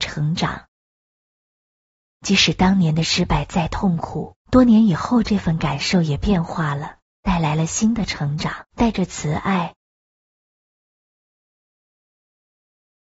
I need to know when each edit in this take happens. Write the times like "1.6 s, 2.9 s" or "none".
4.4 s, 7.1 s, 8.7 s